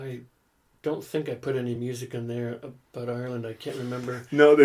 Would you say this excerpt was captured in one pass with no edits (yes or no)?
yes